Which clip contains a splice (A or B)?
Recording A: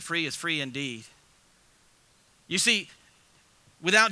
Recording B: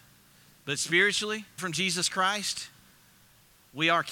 B